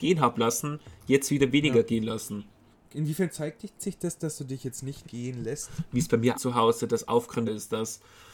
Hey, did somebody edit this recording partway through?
yes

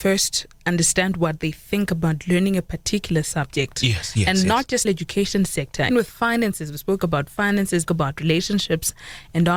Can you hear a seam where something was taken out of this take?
yes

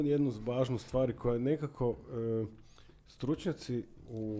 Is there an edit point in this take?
no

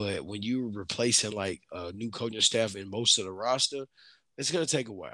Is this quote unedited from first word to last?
yes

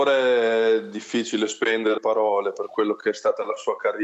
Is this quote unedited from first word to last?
no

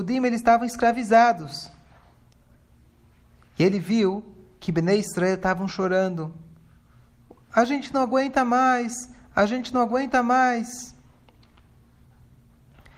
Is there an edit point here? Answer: no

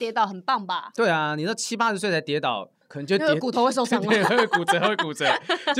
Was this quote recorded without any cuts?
no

